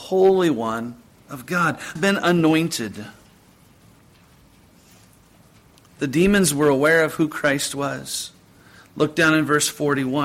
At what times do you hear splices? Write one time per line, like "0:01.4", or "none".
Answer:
0:02.0